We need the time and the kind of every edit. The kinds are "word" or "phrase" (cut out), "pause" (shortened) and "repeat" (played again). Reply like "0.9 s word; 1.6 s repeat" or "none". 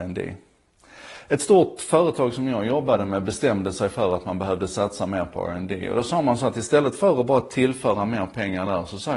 none